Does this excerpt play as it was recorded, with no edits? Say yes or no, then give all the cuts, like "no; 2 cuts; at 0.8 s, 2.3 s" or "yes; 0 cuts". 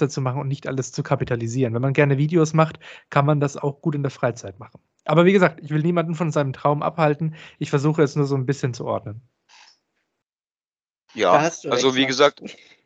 yes; 0 cuts